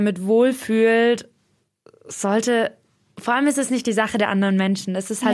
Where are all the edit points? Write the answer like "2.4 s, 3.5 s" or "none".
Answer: none